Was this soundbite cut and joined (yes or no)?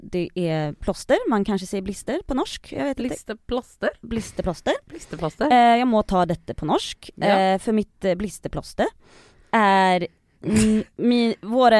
no